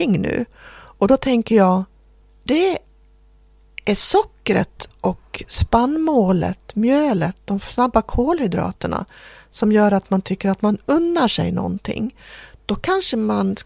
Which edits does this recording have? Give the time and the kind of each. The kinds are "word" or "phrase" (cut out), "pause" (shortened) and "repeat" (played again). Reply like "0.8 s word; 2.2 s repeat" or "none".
2.5 s word